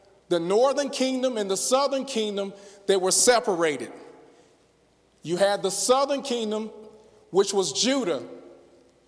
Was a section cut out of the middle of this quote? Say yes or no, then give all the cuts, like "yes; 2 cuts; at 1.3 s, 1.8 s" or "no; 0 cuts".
no; 0 cuts